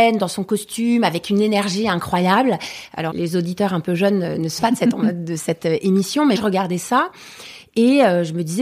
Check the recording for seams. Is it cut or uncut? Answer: cut